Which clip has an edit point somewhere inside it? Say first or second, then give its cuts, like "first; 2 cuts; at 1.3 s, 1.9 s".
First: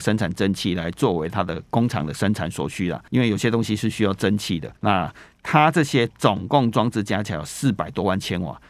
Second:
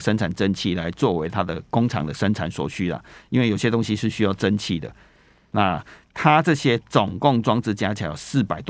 first; 2 cuts; at 3.1 s, 4.8 s